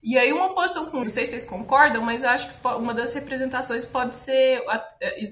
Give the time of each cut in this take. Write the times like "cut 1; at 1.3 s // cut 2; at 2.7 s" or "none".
cut 1; at 1.0 s